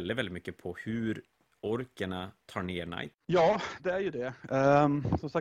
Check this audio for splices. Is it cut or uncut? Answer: uncut